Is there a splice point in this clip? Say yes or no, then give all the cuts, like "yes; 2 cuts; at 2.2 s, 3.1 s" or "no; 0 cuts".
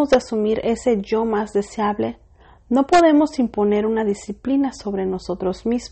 no; 0 cuts